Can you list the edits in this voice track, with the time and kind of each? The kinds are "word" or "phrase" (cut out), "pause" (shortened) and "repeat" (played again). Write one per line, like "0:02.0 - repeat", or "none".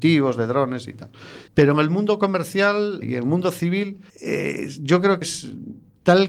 0:01.5 - pause
0:03.0 - word
0:04.1 - pause
0:05.2 - word